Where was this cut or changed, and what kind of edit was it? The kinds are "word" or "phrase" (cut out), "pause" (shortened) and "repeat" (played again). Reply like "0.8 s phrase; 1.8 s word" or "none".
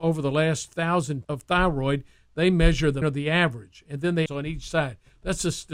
1.2 s word; 3.0 s word; 4.3 s phrase